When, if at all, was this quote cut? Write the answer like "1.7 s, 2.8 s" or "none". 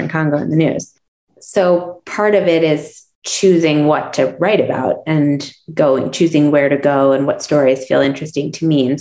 none